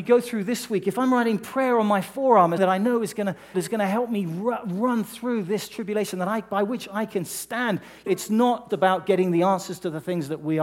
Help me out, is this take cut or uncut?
cut